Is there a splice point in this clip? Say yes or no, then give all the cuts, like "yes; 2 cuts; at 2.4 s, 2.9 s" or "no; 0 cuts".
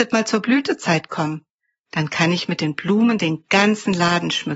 no; 0 cuts